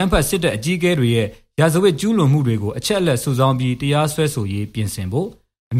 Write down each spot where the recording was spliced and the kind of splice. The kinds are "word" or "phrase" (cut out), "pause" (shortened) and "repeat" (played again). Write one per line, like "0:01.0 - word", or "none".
none